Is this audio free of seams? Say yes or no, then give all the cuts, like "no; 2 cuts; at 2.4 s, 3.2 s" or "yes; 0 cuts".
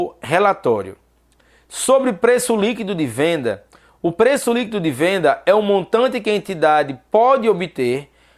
yes; 0 cuts